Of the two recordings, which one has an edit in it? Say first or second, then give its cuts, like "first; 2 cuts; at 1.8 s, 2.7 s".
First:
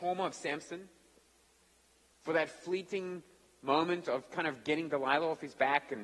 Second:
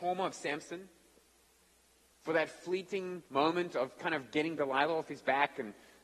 second; 1 cut; at 3.3 s